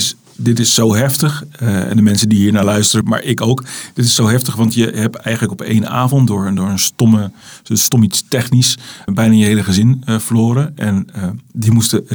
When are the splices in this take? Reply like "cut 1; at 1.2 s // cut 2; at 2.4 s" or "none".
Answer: cut 1; at 3.0 s // cut 2; at 9.1 s